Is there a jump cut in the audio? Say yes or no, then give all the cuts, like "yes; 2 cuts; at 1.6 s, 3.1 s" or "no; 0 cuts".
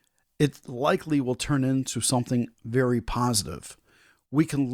no; 0 cuts